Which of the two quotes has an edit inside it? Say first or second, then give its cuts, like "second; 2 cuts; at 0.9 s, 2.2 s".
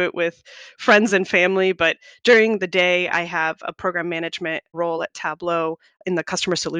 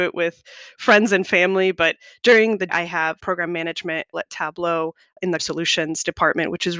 second; 4 cuts; at 2.7 s, 3.2 s, 4.1 s, 5.4 s